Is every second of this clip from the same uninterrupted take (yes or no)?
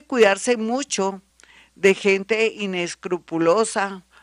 yes